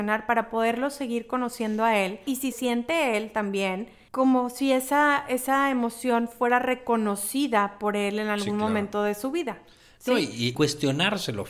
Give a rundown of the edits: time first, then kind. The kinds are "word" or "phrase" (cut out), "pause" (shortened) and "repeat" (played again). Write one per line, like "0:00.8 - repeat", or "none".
0:02.5 - word